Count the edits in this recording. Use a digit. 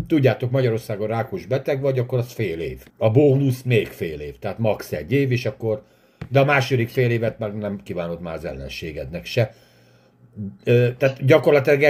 1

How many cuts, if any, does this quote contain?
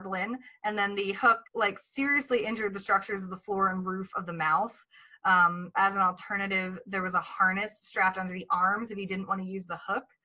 2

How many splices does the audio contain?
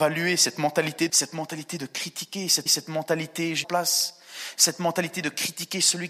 3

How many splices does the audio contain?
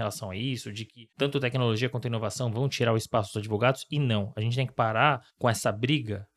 2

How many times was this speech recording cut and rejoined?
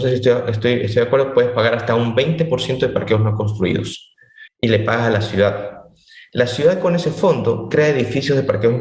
1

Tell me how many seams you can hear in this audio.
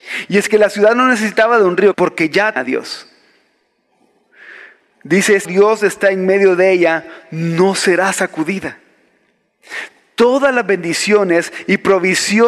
3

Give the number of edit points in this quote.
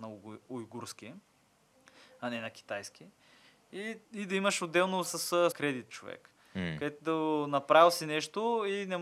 3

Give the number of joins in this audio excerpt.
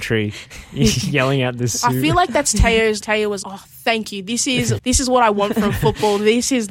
3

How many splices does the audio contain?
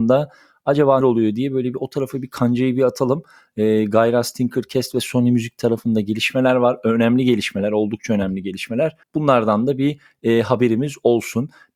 2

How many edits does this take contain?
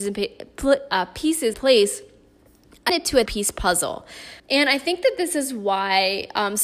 4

